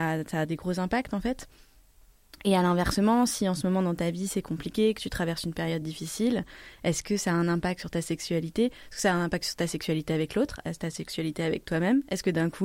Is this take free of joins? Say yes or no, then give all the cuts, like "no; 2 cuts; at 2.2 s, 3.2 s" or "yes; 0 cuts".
yes; 0 cuts